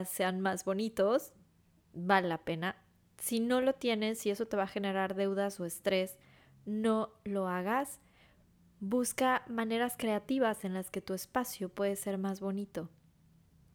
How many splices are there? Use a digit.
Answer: 0